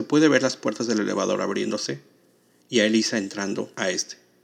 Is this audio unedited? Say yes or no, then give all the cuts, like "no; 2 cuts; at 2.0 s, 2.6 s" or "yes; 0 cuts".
yes; 0 cuts